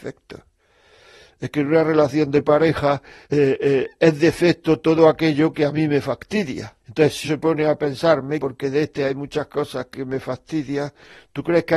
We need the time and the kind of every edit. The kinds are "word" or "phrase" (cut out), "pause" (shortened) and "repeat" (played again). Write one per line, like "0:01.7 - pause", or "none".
0:03.2 - pause
0:06.8 - pause
0:07.2 - word
0:08.4 - word